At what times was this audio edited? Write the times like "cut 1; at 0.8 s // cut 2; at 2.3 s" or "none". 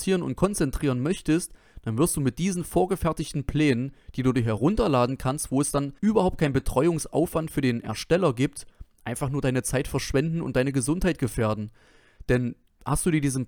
cut 1; at 6.0 s